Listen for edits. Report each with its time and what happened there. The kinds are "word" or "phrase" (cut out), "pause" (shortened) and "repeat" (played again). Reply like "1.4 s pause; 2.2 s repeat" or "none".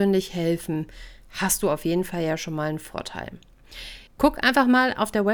4.1 s pause